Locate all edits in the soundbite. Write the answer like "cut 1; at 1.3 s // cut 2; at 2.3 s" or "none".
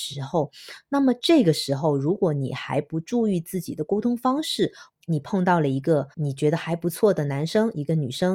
cut 1; at 4.9 s // cut 2; at 6.1 s